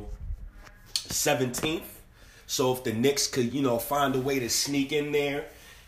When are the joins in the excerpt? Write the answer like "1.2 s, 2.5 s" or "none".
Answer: none

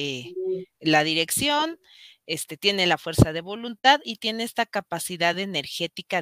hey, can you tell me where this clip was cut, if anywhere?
none

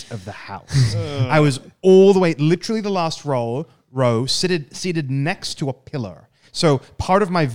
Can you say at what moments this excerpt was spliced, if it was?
none

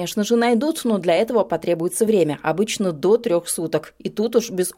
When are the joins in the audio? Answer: none

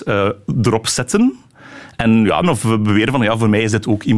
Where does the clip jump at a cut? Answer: 2.4 s

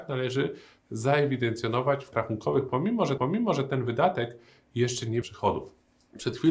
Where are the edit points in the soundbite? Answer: 2.1 s, 3.2 s, 5.2 s

